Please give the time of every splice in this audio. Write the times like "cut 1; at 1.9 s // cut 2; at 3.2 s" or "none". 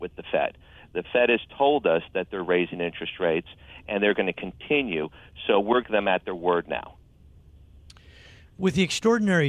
cut 1; at 5.8 s